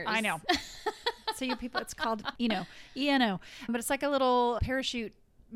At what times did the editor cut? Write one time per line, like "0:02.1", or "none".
0:02.4
0:03.7
0:04.6